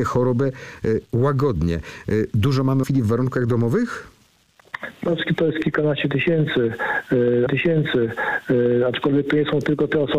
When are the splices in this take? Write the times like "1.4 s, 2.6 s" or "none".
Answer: 2.8 s, 7.5 s